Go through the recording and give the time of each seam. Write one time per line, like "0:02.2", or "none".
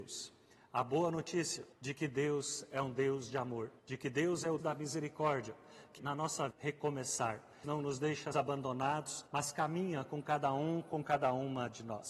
0:01.7
0:03.8
0:04.6
0:06.0
0:06.5
0:07.6
0:08.3
0:09.3